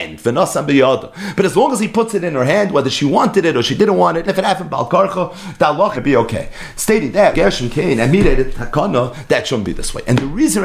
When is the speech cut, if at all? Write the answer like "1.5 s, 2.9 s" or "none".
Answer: 4.3 s, 5.9 s, 7.3 s